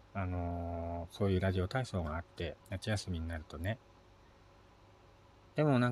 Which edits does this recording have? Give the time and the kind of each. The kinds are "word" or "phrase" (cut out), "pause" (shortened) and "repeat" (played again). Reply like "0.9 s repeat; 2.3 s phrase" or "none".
2.6 s pause